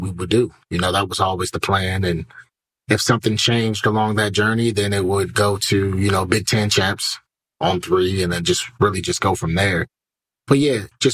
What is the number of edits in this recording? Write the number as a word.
zero